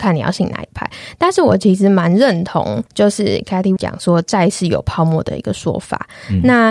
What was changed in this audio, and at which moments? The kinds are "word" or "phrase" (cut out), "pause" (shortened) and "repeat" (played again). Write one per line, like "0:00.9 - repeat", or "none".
0:02.9 - pause
0:03.8 - word